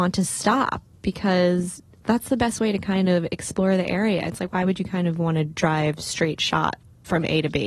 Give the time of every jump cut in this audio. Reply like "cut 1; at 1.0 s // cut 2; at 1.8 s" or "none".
none